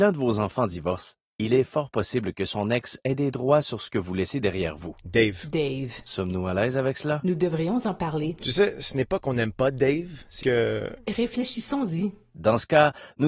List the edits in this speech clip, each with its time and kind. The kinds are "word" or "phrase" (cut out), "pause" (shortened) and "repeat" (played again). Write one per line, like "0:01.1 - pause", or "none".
0:10.4 - word